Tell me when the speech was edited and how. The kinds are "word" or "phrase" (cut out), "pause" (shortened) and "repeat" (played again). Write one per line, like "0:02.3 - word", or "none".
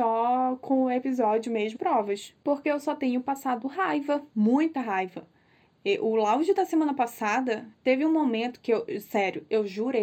0:01.7 - word
0:04.3 - pause
0:07.7 - pause